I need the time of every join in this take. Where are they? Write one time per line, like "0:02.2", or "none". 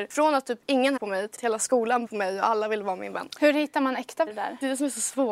0:01.0
0:01.4
0:02.1
0:04.3